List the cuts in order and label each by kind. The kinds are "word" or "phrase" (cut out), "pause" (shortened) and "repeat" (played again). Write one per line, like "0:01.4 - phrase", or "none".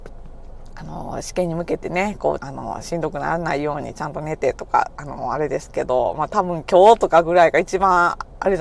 0:02.4 - phrase